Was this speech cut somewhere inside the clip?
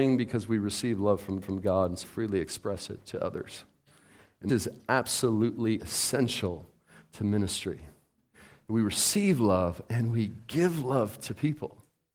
yes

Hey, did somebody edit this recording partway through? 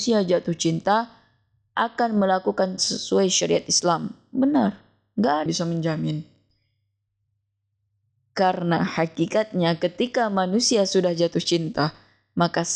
yes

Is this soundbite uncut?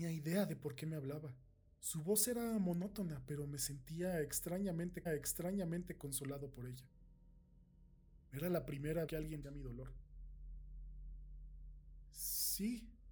no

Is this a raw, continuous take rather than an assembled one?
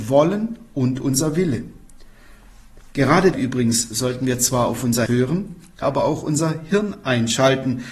no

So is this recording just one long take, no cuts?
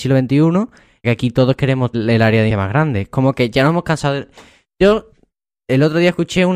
no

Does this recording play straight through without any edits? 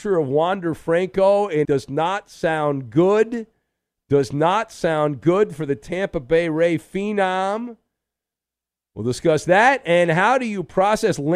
no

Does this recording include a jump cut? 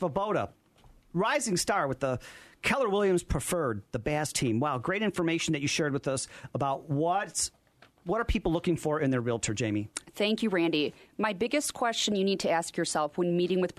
no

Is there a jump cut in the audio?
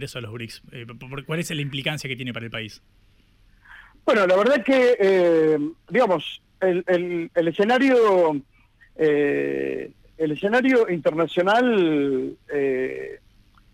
no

